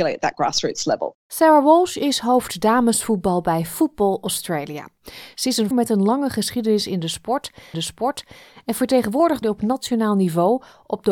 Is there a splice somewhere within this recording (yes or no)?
yes